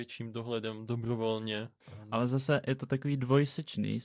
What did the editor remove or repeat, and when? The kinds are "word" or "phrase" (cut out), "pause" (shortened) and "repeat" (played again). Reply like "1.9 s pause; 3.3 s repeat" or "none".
none